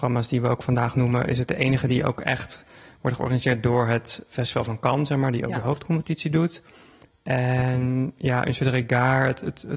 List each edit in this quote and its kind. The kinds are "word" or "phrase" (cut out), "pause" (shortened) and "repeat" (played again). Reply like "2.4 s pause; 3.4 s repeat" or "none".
none